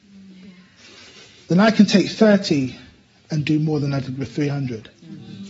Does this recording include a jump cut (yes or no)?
no